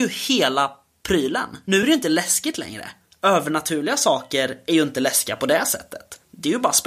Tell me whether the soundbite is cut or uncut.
uncut